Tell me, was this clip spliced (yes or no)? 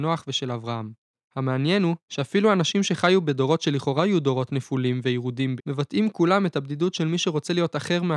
yes